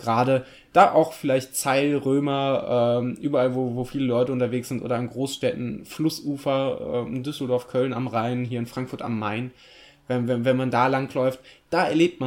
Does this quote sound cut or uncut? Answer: uncut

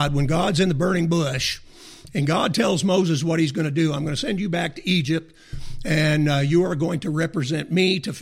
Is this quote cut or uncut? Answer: uncut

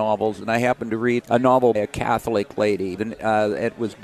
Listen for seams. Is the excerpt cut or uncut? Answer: cut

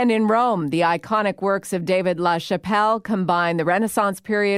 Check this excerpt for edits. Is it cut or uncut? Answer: uncut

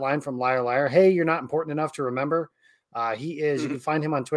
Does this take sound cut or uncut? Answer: uncut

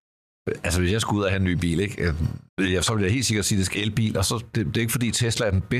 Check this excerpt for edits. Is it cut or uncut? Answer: cut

